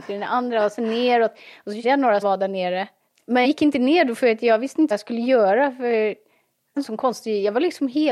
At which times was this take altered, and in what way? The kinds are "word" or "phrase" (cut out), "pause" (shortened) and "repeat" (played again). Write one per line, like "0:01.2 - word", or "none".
0:01.8 - word
0:02.2 - word
0:03.4 - word
0:04.9 - word
0:06.8 - word